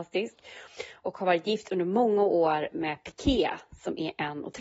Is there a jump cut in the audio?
no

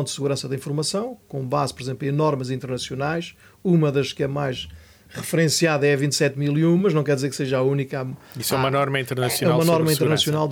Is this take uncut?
yes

